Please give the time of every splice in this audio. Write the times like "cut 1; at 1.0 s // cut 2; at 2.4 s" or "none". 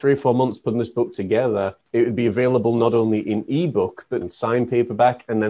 cut 1; at 1.8 s // cut 2; at 4.2 s